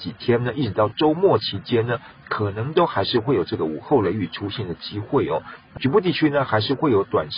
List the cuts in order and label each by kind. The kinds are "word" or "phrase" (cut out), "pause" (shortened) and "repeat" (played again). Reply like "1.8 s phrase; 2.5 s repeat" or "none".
5.8 s word